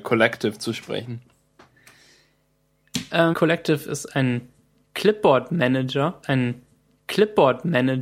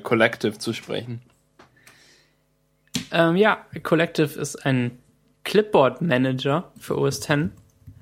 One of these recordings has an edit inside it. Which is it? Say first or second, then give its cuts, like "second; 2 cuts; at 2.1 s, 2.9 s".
first; 2 cuts; at 3.3 s, 6.2 s